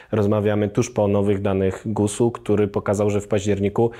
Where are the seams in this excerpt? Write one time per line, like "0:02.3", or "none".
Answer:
none

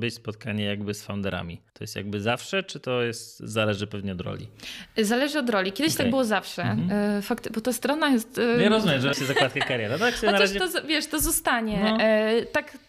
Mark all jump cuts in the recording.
0:01.7
0:09.1

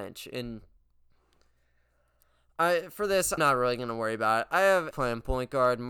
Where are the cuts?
0:03.4
0:04.9

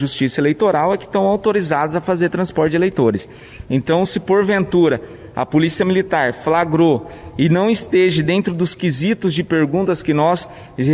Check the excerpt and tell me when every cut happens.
none

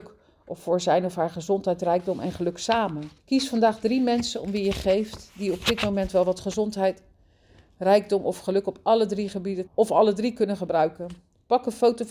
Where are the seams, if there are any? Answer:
0:03.2
0:09.7

